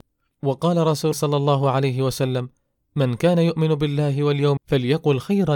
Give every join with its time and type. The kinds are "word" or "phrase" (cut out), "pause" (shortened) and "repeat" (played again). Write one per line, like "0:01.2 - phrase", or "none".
0:01.1 - word
0:04.6 - word